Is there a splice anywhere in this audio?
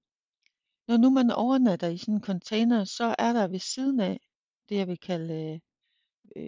no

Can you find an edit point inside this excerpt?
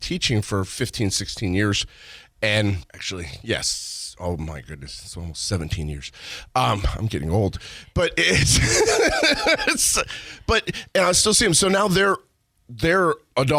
yes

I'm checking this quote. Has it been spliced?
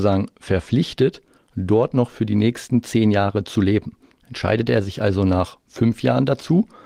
no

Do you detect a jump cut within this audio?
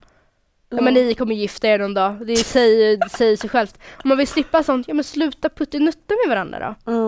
no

